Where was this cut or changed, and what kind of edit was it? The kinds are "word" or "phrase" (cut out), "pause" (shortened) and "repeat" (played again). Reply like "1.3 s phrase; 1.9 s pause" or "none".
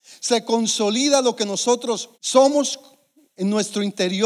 2.1 s pause